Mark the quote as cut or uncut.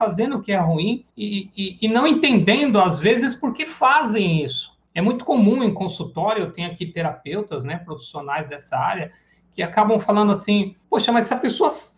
cut